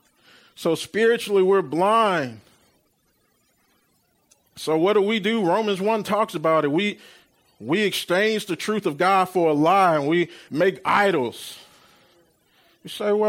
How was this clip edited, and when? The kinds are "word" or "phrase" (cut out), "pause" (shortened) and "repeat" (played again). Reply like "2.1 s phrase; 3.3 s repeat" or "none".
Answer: none